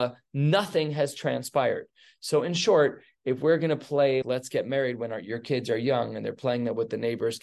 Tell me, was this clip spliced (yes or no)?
yes